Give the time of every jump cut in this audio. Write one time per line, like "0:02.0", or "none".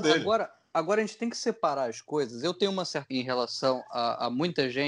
0:03.1